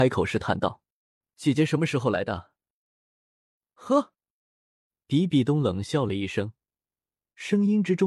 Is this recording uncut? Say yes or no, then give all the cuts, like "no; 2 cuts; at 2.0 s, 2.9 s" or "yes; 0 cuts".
yes; 0 cuts